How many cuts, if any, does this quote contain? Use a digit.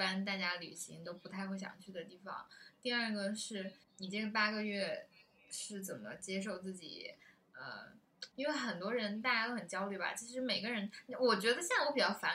2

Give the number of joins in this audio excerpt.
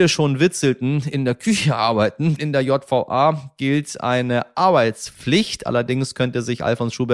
1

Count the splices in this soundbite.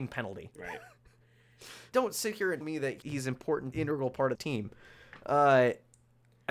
5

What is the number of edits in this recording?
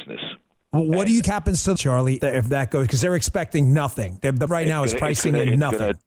4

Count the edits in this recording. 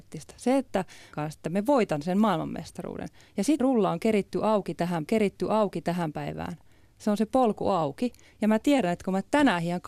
3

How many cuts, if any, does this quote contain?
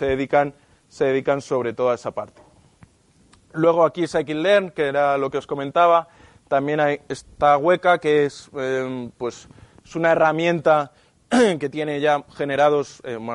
0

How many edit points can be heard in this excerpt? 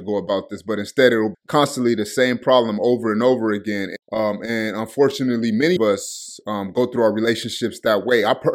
3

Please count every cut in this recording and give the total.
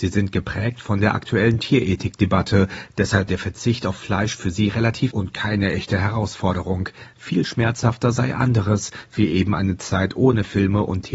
2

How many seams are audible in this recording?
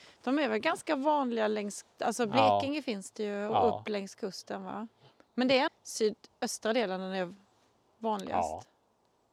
3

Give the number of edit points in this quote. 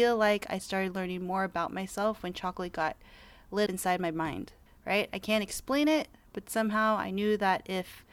2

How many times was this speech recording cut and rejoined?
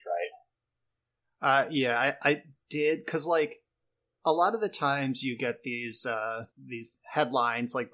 1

